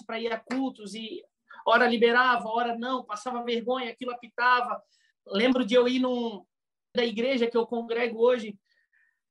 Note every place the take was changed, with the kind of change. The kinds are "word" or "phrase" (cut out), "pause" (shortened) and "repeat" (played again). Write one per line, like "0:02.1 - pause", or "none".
0:06.9 - word